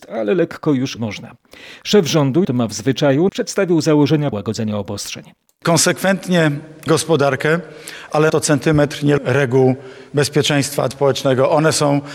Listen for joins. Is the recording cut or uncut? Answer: cut